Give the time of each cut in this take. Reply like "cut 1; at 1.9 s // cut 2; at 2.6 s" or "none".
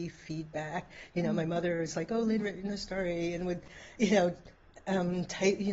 cut 1; at 2.4 s